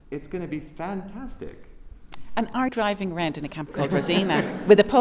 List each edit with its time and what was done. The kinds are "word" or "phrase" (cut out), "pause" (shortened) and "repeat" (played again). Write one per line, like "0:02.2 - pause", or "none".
0:02.7 - word
0:03.7 - word